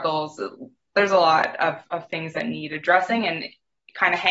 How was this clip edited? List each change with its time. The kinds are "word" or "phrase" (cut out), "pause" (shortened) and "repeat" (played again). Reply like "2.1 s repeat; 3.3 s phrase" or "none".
none